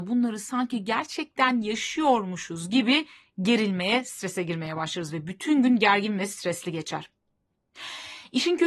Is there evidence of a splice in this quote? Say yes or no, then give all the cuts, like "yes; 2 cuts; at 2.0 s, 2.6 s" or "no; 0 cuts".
no; 0 cuts